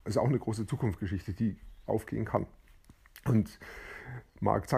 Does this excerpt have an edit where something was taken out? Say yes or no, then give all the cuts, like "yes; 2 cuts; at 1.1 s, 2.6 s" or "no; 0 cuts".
yes; 1 cut; at 1.9 s